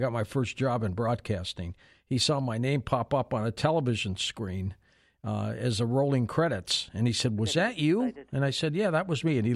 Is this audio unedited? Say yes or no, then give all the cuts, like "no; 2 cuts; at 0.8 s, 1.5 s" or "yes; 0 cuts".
yes; 0 cuts